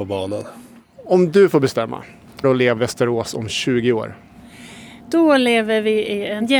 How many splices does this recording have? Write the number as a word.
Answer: three